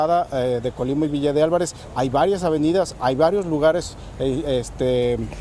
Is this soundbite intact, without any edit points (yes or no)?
yes